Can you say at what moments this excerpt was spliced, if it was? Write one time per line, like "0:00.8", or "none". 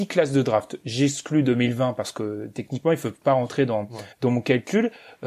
0:04.1